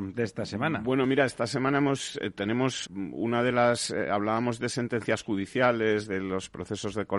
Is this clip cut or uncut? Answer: cut